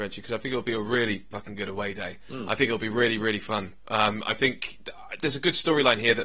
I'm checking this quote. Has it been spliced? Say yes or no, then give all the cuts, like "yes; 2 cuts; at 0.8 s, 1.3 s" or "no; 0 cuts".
yes; 1 cut; at 1.3 s